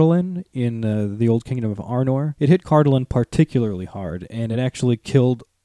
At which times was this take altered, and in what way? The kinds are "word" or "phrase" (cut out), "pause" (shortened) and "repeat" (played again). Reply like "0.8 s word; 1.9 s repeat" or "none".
none